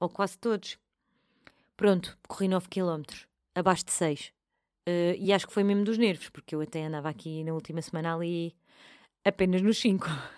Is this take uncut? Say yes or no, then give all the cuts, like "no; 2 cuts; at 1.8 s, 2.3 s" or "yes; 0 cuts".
yes; 0 cuts